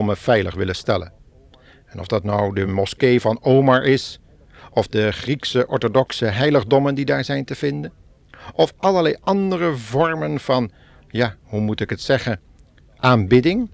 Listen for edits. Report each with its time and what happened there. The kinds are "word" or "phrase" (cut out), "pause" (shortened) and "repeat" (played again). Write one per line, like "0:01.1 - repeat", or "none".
none